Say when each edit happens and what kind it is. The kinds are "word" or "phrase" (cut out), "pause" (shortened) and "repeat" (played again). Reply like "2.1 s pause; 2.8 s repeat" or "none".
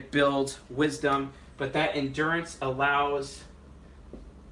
none